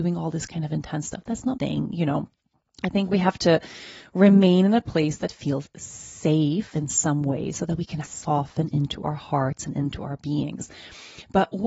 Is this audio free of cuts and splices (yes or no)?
no